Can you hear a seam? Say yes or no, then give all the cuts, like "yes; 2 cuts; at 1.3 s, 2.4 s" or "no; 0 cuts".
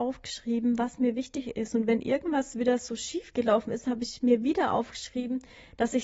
no; 0 cuts